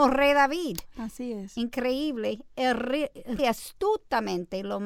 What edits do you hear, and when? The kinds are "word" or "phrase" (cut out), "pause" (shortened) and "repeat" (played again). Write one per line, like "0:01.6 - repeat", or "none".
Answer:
0:03.4 - word